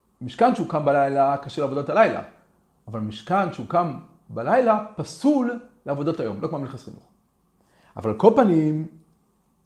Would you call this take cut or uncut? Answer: uncut